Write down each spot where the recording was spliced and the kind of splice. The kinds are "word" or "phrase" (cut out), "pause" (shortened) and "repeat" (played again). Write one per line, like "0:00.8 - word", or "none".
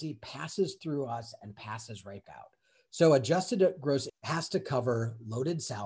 0:02.2 - word
0:04.1 - word

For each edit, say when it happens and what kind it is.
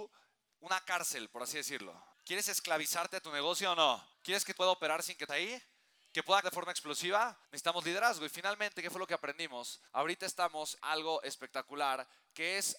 0:02.1 - pause
0:04.1 - pause
0:04.6 - word
0:05.3 - word
0:06.4 - word
0:07.4 - pause
0:09.9 - pause
0:10.8 - word

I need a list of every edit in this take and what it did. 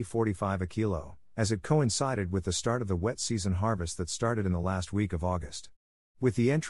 none

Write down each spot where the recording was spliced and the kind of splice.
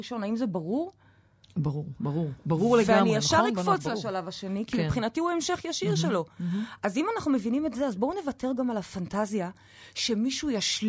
none

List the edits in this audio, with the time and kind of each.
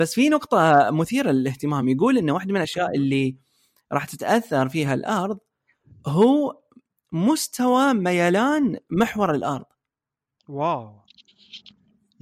none

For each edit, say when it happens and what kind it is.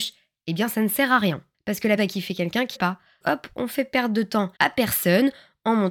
0:02.0 - word
0:02.8 - word
0:03.2 - word
0:04.6 - pause

